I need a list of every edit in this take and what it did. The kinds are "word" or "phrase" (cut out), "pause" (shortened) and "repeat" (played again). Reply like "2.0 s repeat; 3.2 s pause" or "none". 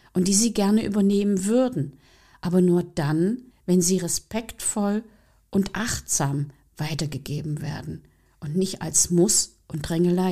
3.5 s pause